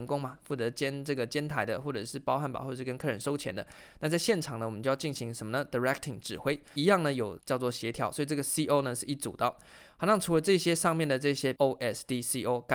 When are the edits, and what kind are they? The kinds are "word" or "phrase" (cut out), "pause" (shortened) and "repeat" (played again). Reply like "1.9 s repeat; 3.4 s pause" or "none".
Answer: 7.4 s word; 11.6 s word

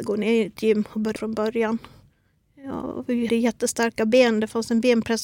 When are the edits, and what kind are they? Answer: 1.2 s word; 3.3 s word

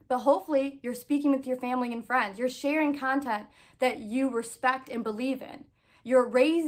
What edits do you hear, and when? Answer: none

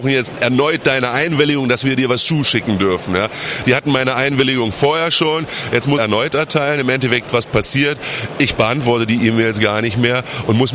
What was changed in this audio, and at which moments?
6.0 s phrase

